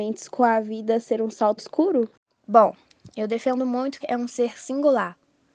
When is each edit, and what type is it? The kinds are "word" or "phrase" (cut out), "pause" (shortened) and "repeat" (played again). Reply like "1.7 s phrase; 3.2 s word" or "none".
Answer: 1.6 s word; 4.0 s phrase